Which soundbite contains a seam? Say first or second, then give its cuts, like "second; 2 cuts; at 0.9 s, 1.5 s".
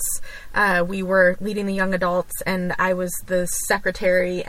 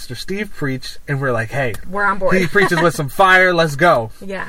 second; 1 cut; at 1.8 s